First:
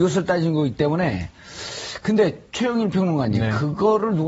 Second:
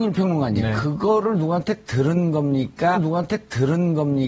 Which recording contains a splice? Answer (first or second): second